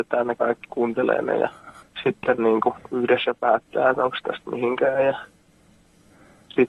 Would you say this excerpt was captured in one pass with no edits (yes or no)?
no